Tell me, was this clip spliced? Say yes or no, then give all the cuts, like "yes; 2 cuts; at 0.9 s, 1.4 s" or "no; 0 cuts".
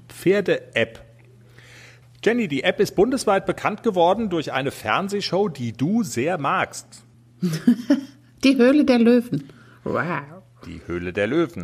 no; 0 cuts